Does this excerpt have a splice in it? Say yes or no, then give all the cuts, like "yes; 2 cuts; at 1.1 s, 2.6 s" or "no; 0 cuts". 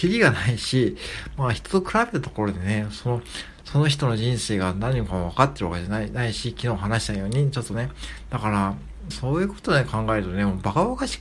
yes; 1 cut; at 9.1 s